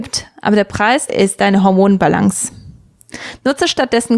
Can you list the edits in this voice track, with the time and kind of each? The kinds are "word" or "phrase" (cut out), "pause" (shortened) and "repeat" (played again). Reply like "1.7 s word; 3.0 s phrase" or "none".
1.1 s word